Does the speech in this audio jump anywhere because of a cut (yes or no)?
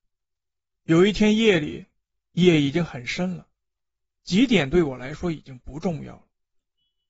no